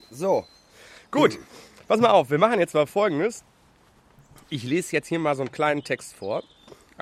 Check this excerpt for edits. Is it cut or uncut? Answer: uncut